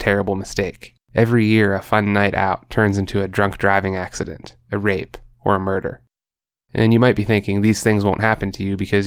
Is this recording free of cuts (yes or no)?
no